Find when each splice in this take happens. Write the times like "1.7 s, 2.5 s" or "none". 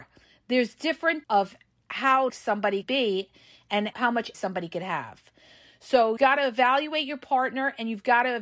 1.2 s, 2.3 s, 2.8 s, 3.9 s, 4.3 s, 6.2 s